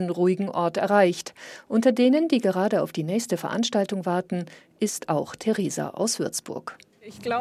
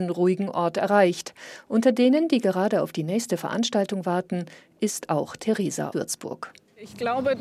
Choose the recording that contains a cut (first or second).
second